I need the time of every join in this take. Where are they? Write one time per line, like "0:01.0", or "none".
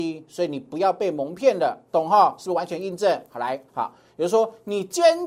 0:03.7